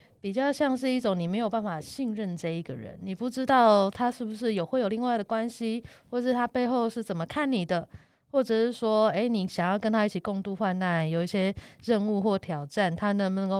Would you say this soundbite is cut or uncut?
uncut